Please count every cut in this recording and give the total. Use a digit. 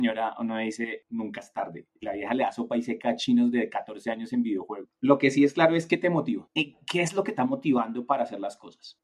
1